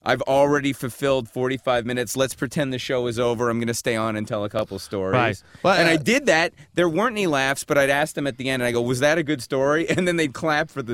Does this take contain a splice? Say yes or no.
no